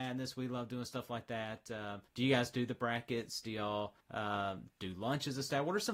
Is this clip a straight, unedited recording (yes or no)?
no